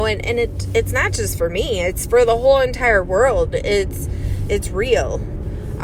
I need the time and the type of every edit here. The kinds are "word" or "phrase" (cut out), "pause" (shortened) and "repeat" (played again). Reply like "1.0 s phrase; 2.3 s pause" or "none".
4.5 s word